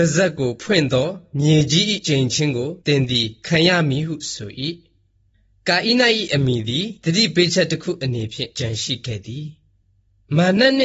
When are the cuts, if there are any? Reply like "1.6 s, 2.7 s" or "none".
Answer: 2.8 s